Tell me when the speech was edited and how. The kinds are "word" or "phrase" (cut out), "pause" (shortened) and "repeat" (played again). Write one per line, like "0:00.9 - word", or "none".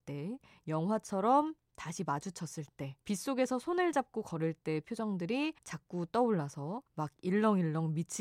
0:03.0 - pause
0:05.6 - pause
0:06.9 - pause